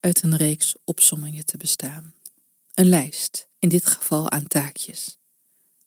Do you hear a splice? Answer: yes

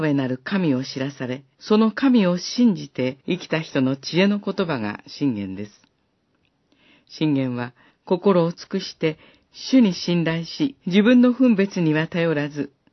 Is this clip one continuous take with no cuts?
no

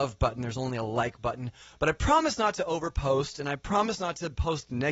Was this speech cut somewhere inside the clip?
no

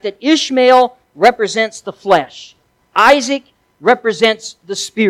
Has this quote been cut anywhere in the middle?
no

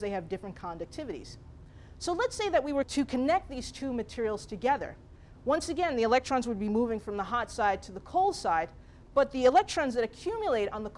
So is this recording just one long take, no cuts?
yes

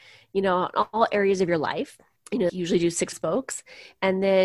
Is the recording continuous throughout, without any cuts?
no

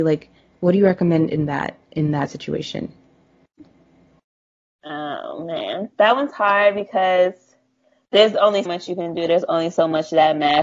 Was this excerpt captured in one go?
no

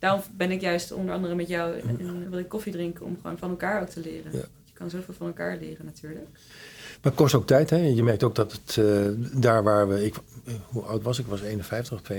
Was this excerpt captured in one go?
no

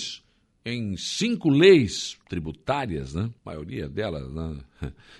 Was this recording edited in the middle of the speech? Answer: yes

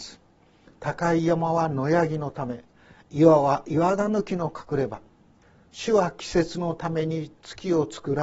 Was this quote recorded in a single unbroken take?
yes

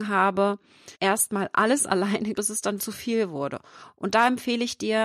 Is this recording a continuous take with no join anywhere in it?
no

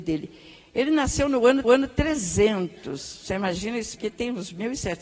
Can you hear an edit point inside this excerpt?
yes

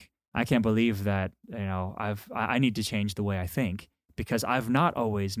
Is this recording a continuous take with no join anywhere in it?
yes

